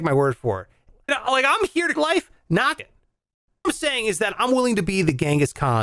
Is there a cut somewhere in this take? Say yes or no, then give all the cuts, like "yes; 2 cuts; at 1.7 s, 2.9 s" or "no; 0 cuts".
yes; 4 cuts; at 1.1 s, 2.0 s, 2.8 s, 3.6 s